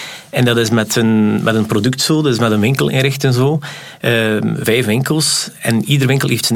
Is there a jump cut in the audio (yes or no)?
yes